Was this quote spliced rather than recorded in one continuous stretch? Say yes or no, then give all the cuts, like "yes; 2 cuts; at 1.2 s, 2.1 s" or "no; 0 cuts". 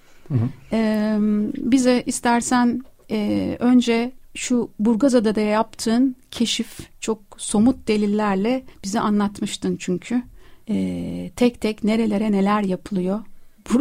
yes; 4 cuts; at 4.2 s, 6.9 s, 8.7 s, 10.6 s